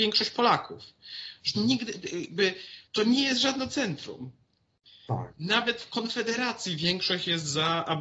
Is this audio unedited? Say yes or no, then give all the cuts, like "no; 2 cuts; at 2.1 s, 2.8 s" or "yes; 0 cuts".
no; 2 cuts; at 1.5 s, 2.9 s